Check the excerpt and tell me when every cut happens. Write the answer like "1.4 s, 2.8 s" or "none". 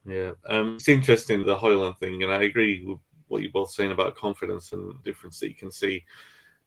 1.4 s, 5.0 s